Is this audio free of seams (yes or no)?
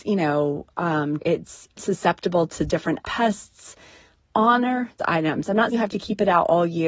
no